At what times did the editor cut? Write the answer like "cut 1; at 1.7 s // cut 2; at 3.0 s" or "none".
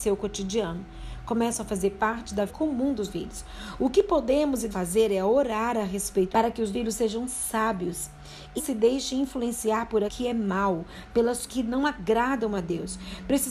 cut 1; at 2.5 s // cut 2; at 3.1 s // cut 3; at 4.7 s // cut 4; at 6.3 s // cut 5; at 6.7 s // cut 6; at 8.6 s // cut 7; at 10.1 s // cut 8; at 11.5 s